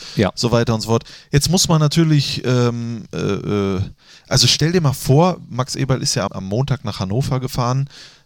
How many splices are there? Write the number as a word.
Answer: one